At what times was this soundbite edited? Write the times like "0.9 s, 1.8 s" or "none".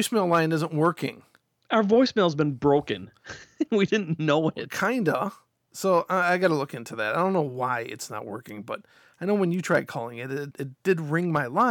10.5 s

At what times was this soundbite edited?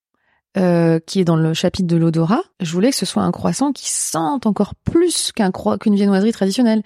2.5 s

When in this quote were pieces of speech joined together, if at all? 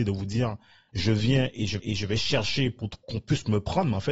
1.8 s

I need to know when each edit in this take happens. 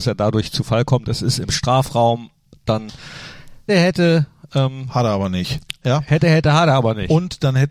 3.7 s

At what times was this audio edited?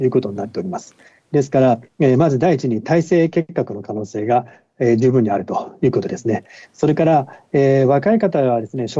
none

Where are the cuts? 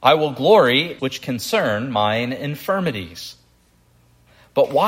1.0 s

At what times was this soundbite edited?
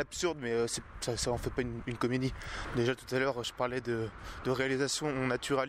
none

